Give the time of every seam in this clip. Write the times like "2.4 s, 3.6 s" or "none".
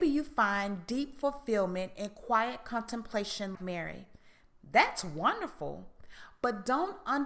3.6 s